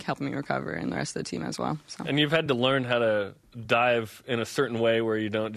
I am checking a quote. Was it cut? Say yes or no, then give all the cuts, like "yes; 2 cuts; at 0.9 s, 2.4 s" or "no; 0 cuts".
no; 0 cuts